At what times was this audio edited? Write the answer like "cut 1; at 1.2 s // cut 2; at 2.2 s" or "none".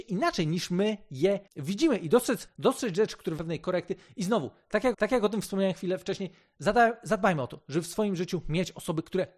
cut 1; at 1.5 s // cut 2; at 2.5 s // cut 3; at 3.4 s // cut 4; at 4.9 s